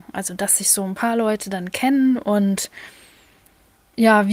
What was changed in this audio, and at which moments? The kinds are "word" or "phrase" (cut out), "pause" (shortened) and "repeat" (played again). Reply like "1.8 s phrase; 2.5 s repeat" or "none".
none

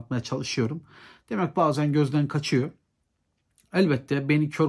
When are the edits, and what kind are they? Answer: none

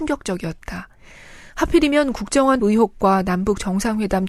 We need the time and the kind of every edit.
2.6 s phrase

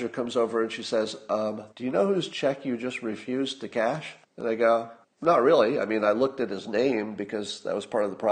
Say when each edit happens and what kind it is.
1.7 s pause; 4.2 s pause; 5.0 s pause

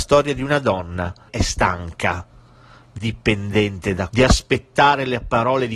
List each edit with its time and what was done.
1.3 s word; 3.0 s word; 4.1 s word

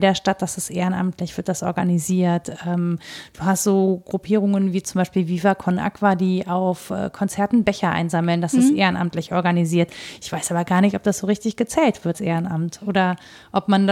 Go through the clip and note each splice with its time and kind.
12.1 s word

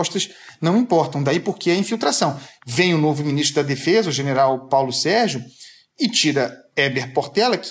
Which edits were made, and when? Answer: none

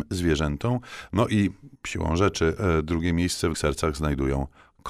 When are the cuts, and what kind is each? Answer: 1.7 s pause; 3.5 s word

